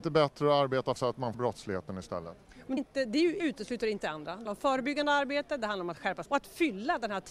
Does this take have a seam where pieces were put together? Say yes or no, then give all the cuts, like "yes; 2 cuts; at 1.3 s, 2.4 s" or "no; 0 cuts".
yes; 7 cuts; at 1.0 s, 1.3 s, 2.8 s, 3.4 s, 4.0 s, 4.5 s, 6.3 s